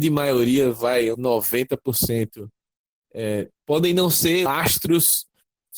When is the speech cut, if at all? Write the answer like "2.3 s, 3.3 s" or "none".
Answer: 1.1 s, 3.6 s, 4.5 s